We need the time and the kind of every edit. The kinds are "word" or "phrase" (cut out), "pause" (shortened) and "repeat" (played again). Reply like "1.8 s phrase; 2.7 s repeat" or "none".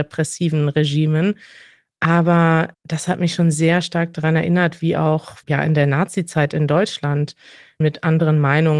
2.7 s pause; 5.4 s pause; 7.8 s word